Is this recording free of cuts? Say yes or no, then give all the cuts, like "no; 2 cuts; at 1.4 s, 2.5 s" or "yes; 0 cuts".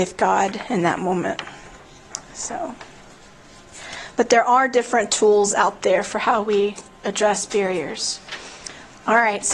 yes; 0 cuts